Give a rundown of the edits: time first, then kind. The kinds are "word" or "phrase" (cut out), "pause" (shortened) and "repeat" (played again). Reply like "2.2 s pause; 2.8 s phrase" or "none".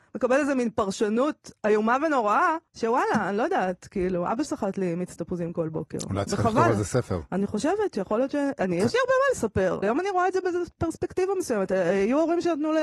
2.7 s pause; 4.5 s phrase; 9.8 s word